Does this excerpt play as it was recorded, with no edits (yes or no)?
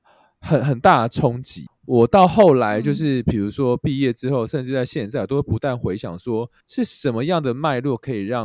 no